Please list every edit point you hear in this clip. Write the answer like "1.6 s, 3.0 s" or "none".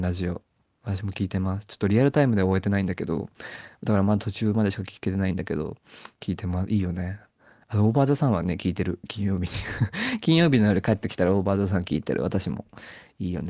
none